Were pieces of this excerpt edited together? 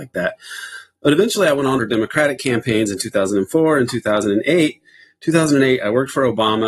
yes; 1 cut; at 1.8 s

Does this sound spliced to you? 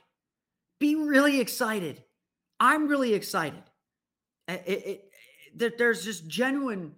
no; 0 cuts

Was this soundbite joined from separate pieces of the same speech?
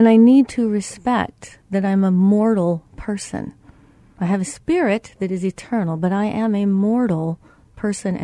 no; 0 cuts

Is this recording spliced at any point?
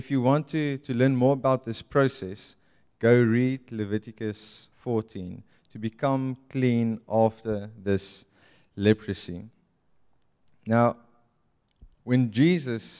yes; 2 cuts; at 4.7 s, 11.9 s

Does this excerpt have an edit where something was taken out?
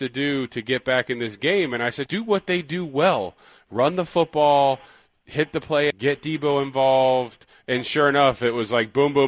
yes; 2 cuts; at 2.1 s, 5.9 s

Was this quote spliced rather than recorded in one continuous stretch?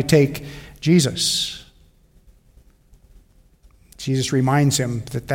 no; 0 cuts

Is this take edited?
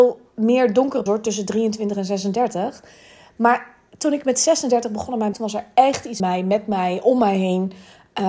yes; 3 cuts; at 1.1 s, 5.3 s, 6.2 s

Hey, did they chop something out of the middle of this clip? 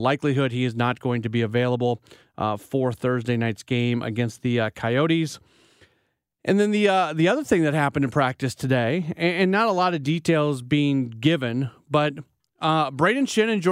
no; 0 cuts

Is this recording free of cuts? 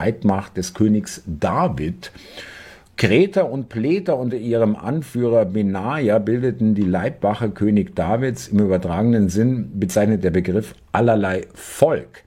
yes; 0 cuts

